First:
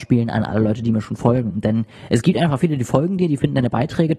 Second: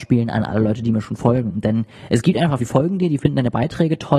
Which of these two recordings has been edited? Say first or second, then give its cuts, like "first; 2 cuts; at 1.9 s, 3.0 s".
second; 1 cut; at 2.6 s